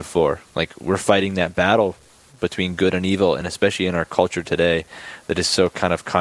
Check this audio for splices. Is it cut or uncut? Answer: uncut